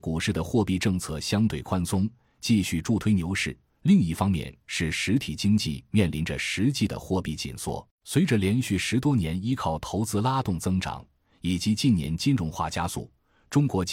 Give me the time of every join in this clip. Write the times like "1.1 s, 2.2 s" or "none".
7.9 s